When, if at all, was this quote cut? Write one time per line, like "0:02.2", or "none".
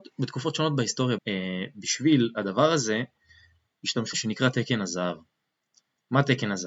0:01.2
0:04.1